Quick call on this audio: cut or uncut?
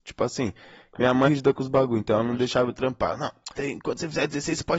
cut